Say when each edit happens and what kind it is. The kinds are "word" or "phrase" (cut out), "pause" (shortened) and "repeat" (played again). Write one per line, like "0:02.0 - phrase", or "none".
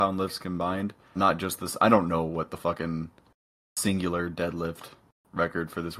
0:01.2 - word